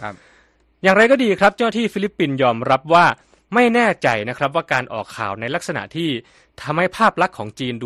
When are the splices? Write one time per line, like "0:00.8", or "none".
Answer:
none